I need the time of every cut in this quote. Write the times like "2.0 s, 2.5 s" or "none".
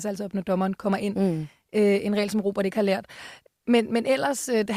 none